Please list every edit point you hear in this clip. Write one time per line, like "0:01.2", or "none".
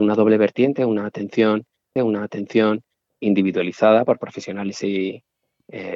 0:02.0